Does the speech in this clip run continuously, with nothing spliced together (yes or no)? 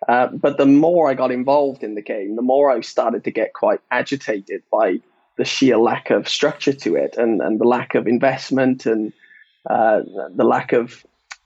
yes